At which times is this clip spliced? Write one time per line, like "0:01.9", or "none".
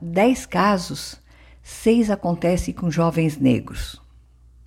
none